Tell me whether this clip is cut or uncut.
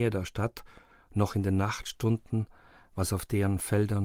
uncut